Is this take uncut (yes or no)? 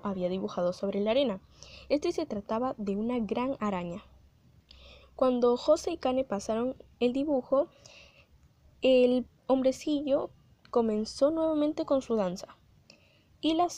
yes